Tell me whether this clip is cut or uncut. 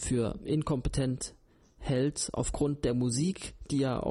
uncut